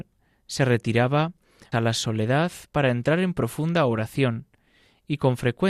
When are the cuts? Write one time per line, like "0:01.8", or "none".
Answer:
0:01.7